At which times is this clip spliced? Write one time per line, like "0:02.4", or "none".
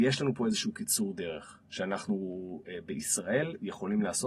none